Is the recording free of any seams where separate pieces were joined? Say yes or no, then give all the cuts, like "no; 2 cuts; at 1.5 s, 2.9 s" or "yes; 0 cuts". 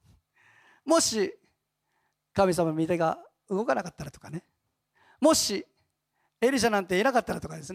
yes; 0 cuts